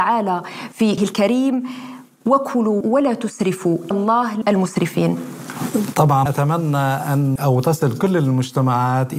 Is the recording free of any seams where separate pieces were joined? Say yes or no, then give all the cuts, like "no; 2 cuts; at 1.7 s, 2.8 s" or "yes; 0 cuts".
no; 6 cuts; at 1.0 s, 2.8 s, 3.9 s, 4.4 s, 6.3 s, 7.4 s